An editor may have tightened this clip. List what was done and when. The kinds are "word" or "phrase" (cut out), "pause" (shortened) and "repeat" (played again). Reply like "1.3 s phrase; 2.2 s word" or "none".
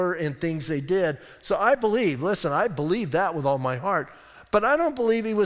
none